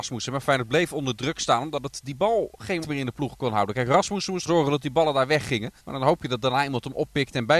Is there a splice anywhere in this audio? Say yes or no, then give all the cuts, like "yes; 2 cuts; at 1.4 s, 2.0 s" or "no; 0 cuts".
yes; 3 cuts; at 2.8 s, 4.5 s, 5.8 s